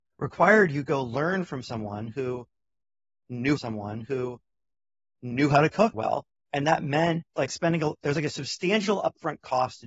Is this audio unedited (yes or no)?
no